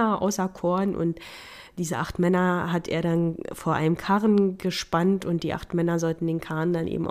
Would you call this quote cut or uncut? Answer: uncut